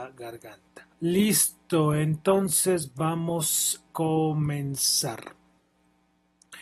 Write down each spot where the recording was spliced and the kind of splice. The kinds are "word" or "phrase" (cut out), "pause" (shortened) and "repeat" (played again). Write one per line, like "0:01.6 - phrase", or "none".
0:00.9 - pause
0:03.9 - word